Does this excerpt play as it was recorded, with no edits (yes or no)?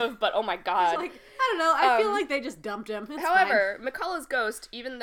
yes